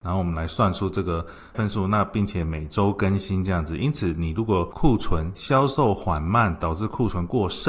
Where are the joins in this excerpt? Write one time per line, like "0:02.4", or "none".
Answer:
0:01.5